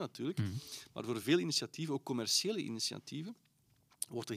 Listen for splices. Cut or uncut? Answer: uncut